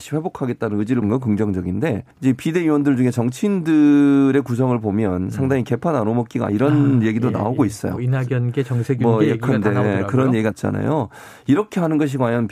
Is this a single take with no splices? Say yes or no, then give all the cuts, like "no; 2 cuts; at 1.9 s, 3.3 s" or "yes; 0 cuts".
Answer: no; 4 cuts; at 1.0 s, 2.1 s, 6.5 s, 10.5 s